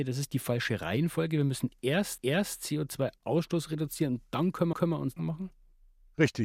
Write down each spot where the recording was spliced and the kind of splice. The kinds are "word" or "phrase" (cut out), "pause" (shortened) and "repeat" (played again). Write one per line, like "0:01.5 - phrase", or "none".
0:02.2 - repeat
0:04.7 - repeat
0:05.2 - phrase